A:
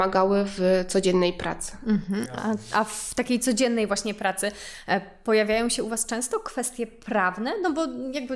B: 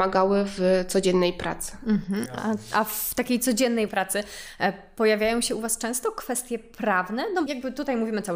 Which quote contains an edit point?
B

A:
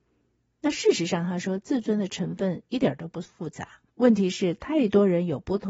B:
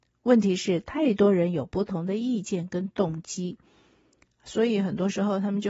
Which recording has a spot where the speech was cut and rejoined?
A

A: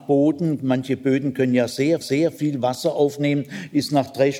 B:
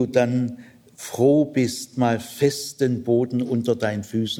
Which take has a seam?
A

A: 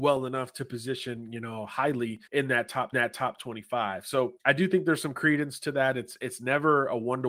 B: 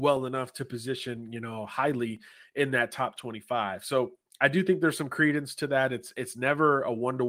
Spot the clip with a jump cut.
A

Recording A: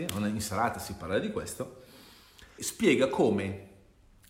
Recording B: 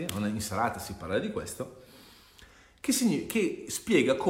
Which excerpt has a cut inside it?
A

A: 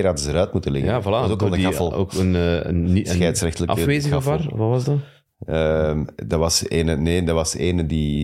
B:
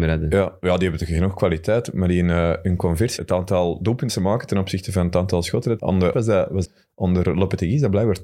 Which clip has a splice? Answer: B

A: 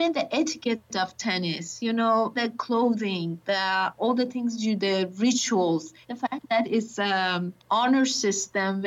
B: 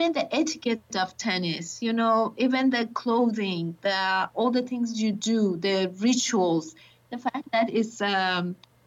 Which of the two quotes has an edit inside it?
A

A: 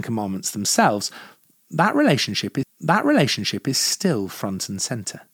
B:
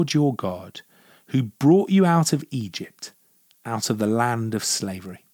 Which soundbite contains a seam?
A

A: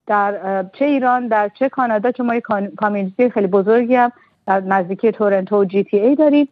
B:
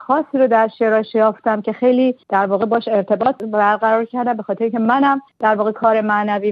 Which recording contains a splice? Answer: B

